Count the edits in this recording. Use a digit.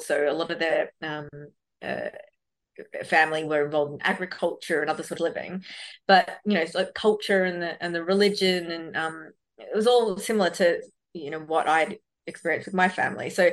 1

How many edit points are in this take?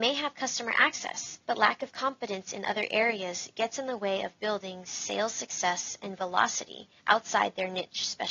2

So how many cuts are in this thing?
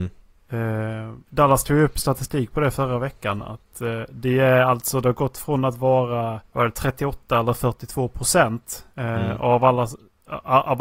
3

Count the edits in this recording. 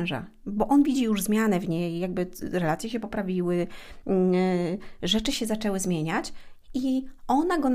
0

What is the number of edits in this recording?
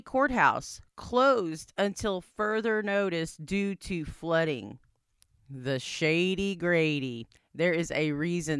0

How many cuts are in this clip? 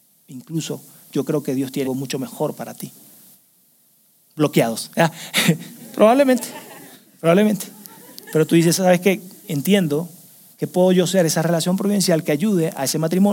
1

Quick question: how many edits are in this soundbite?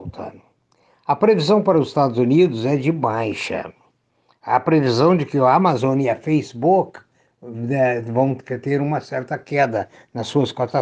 0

